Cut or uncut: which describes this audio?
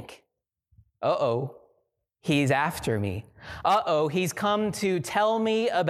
uncut